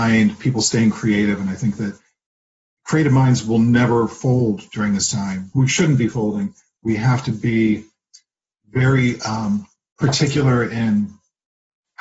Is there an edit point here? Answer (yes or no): no